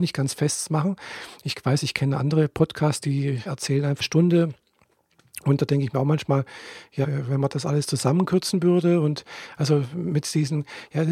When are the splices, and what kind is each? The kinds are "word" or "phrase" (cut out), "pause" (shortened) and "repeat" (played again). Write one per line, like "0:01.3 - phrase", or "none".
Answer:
0:03.5 - word
0:04.0 - phrase
0:07.0 - word